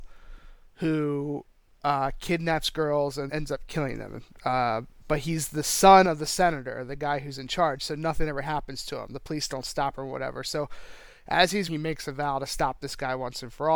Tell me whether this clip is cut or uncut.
cut